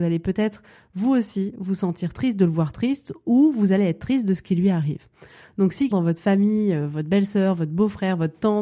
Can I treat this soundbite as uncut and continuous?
no; 1 cut; at 5.9 s

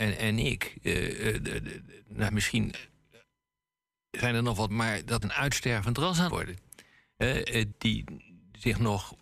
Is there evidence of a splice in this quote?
yes; 5 cuts; at 2.3 s, 4.7 s, 5.2 s, 6.3 s, 7.7 s

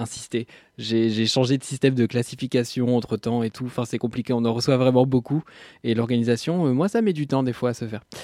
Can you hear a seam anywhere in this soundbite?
no; 0 cuts

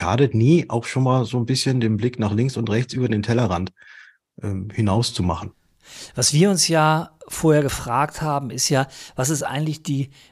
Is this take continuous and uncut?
yes; 0 cuts

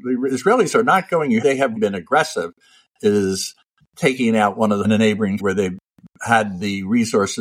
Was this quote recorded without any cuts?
no; 4 cuts; at 1.4 s, 1.8 s, 4.8 s, 5.4 s

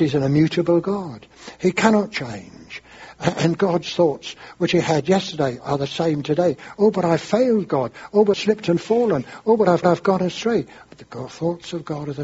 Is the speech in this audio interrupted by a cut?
yes; 2 cuts; at 8.3 s, 9.8 s

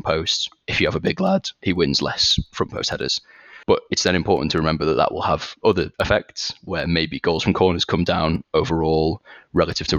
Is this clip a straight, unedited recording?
no; 2 cuts; at 3.6 s, 5.9 s

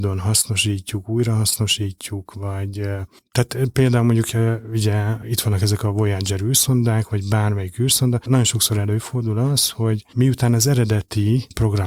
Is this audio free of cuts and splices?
yes; 0 cuts

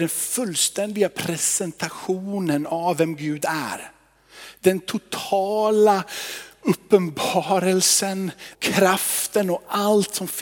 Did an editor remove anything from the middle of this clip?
yes; 1 cut; at 8.5 s

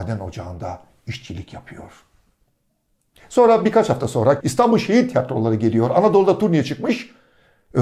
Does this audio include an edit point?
yes; 1 cut; at 4.4 s

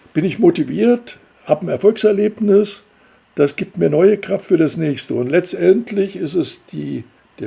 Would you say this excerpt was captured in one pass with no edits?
yes; 0 cuts

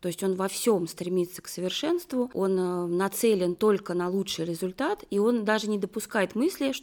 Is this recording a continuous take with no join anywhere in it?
yes; 0 cuts

